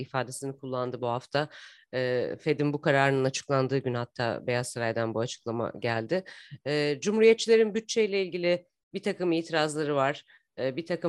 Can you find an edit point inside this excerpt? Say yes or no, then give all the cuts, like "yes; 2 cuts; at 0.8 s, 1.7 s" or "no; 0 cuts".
no; 0 cuts